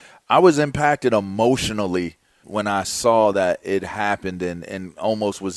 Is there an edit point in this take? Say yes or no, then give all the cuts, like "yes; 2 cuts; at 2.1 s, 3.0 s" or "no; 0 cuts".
yes; 1 cut; at 2.4 s